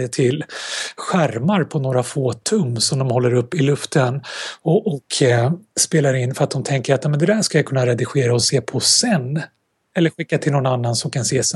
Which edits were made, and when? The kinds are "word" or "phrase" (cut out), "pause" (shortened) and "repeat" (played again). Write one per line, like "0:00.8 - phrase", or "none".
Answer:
none